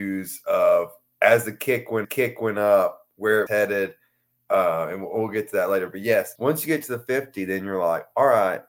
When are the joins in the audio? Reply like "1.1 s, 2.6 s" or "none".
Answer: 2.0 s, 3.5 s, 6.4 s